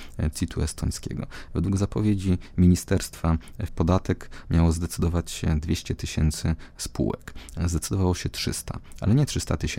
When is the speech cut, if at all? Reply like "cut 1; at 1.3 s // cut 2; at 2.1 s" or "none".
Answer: cut 1; at 3.7 s